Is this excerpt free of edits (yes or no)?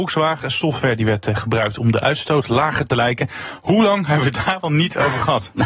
no